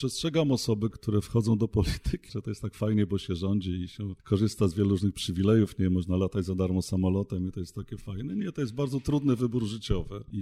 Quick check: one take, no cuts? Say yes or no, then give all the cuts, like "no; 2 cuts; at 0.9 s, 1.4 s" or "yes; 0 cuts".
no; 3 cuts; at 0.9 s, 2.3 s, 4.2 s